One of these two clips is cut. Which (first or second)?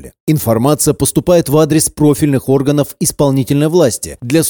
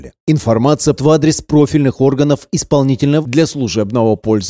second